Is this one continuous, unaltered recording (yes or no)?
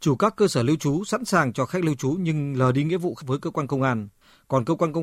no